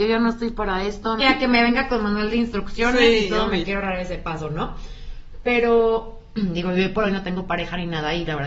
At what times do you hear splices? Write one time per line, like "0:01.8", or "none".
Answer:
0:01.2